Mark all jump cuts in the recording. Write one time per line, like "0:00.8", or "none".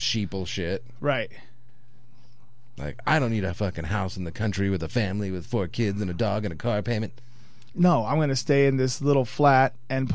none